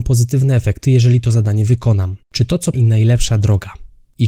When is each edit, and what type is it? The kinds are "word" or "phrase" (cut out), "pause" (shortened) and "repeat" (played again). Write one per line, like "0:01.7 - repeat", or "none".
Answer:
0:02.2 - pause
0:02.7 - phrase